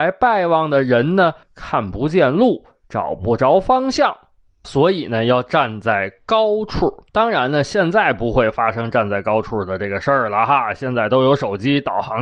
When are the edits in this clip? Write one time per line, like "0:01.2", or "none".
0:01.4
0:04.6
0:07.1

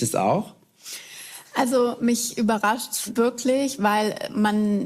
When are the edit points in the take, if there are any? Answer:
0:03.2

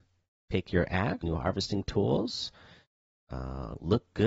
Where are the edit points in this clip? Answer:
0:01.2

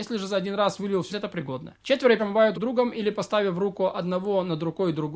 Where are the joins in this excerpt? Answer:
0:01.1
0:01.8
0:02.2
0:02.5

